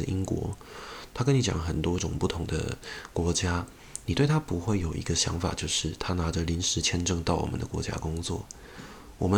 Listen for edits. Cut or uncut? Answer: uncut